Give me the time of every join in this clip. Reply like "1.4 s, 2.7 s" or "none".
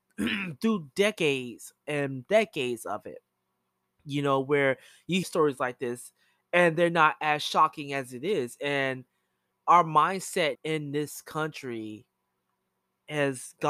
5.2 s, 10.5 s